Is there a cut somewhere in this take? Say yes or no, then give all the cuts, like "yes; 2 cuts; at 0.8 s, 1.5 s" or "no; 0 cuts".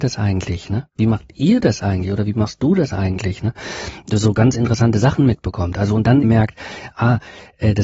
yes; 1 cut; at 6.2 s